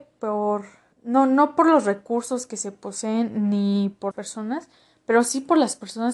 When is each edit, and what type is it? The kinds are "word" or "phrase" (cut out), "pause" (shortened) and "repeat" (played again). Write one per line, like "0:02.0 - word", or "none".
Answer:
0:00.9 - pause
0:04.1 - word